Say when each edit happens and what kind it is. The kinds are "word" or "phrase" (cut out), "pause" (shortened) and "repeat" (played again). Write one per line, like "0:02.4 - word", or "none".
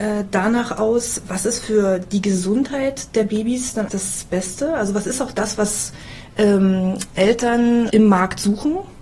0:03.9 - word
0:07.9 - word